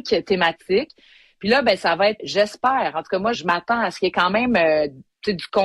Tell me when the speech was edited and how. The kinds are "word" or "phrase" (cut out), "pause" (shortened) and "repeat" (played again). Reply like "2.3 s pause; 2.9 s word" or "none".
2.2 s word; 3.3 s word